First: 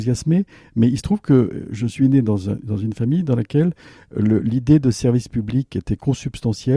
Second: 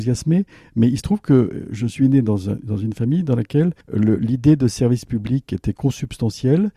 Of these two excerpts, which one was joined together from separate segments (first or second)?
second